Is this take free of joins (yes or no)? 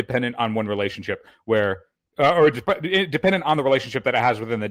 yes